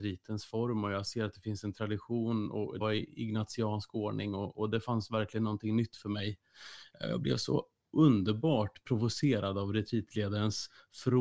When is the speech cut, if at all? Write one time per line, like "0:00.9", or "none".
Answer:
0:02.8